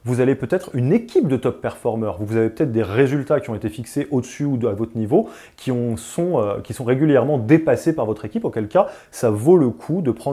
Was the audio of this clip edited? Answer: no; 0 cuts

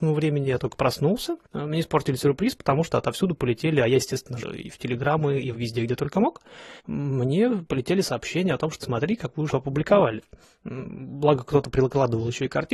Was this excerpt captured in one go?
no; 7 cuts; at 1.4 s, 4.4 s, 5.5 s, 6.8 s, 8.8 s, 9.5 s, 10.4 s

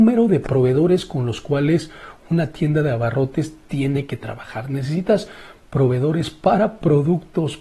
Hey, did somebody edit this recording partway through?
no; 0 cuts

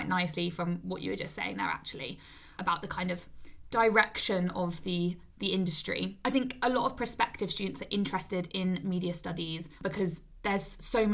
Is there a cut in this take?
yes; 1 cut; at 9.8 s

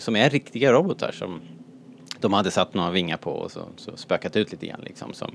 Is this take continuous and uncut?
yes; 0 cuts

